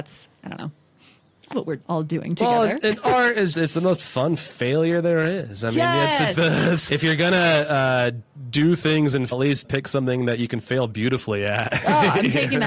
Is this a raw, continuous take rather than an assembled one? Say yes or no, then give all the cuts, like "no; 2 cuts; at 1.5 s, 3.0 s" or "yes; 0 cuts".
no; 6 cuts; at 1.5 s, 3.5 s, 6.3 s, 6.9 s, 9.3 s, 9.6 s